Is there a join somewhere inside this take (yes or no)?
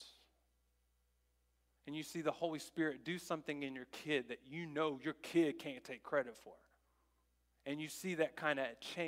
no